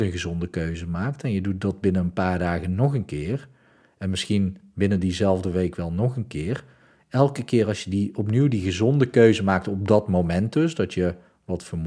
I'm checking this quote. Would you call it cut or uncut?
uncut